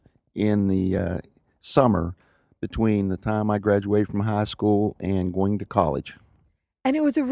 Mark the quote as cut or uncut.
uncut